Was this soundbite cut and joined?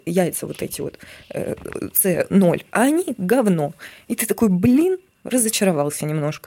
no; 0 cuts

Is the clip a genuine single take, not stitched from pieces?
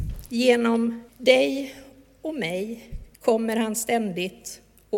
no; 2 cuts; at 1.1 s, 3.1 s

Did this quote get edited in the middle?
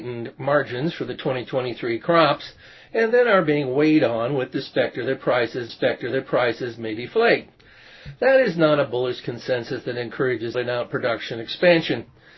yes; 2 cuts; at 5.7 s, 10.5 s

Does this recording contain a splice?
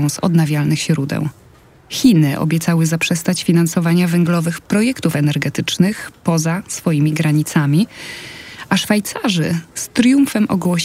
no; 0 cuts

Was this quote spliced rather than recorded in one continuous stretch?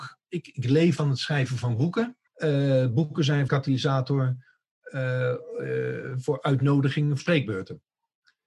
yes; 4 cuts; at 1.0 s, 2.3 s, 3.5 s, 7.2 s

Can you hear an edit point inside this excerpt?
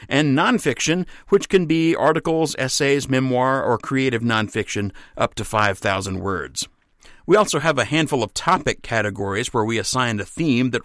no; 0 cuts

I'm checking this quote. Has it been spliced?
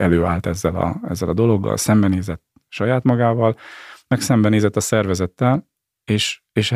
no; 0 cuts

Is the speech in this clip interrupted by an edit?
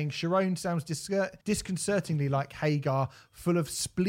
yes; 1 cut; at 1.4 s

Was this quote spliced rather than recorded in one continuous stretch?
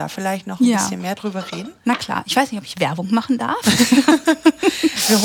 yes; 1 cut; at 1.8 s

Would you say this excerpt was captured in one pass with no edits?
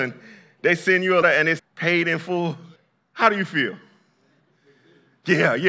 no; 3 cuts; at 1.2 s, 1.6 s, 2.8 s

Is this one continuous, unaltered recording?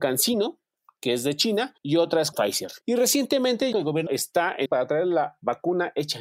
no; 6 cuts; at 1.8 s, 2.3 s, 2.8 s, 3.7 s, 4.1 s, 4.7 s

